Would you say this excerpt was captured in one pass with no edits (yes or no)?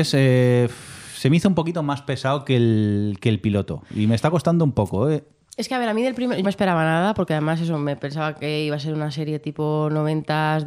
no